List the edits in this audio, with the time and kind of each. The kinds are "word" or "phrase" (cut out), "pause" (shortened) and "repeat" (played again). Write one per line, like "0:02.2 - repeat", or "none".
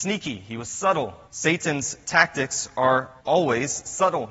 0:01.3 - pause
0:03.2 - pause